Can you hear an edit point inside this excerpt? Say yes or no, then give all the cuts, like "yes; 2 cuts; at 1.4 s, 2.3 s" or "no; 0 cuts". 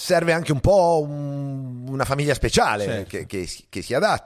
yes; 1 cut; at 3.3 s